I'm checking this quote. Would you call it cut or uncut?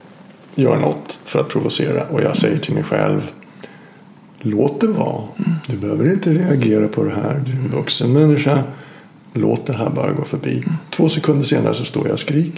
uncut